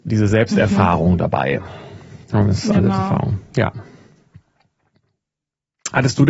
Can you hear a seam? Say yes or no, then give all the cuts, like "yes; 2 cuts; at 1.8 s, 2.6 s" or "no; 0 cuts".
yes; 1 cut; at 2.7 s